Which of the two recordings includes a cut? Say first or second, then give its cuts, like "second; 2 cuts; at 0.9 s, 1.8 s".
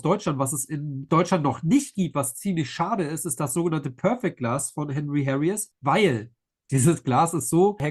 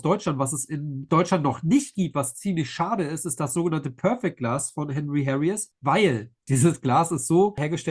second; 1 cut; at 6.4 s